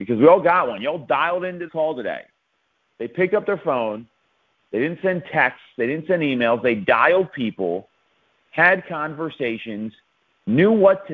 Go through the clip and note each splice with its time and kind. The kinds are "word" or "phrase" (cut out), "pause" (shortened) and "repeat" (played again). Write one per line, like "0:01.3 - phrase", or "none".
0:01.7 - word